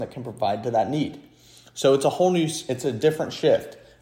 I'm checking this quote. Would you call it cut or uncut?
uncut